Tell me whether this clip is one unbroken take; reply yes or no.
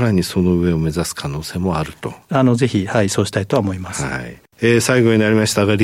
yes